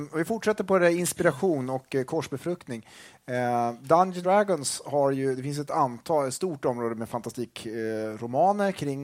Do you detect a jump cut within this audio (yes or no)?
yes